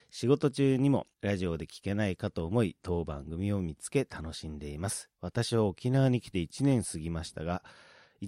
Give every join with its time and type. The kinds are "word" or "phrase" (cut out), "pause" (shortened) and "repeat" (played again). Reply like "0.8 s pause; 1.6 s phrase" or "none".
1.1 s pause